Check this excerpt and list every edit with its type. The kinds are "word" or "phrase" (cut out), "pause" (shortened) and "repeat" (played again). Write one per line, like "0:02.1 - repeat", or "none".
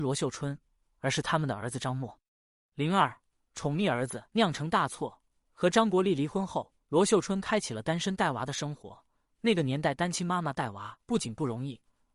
0:04.3 - pause
0:06.8 - pause
0:11.0 - pause